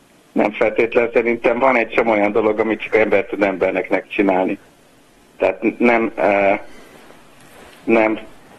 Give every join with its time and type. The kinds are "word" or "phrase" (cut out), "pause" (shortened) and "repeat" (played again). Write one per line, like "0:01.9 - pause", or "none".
none

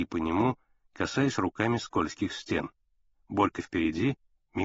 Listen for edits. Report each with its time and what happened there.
none

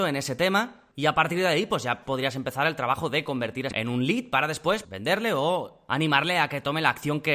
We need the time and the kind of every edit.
0:03.7 - phrase
0:04.8 - word

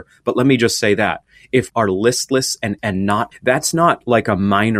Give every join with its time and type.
0:01.7 - word
0:02.8 - word
0:03.3 - word

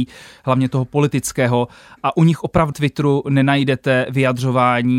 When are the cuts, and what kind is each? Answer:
0:02.7 - word

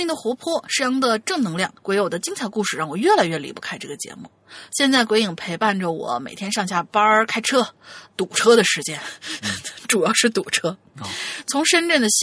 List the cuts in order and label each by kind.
0:01.8 - pause

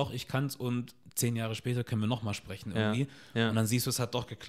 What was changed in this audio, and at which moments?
none

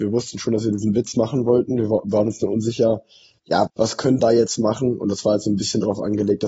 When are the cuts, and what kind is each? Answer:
0:03.7 - word
0:04.2 - word

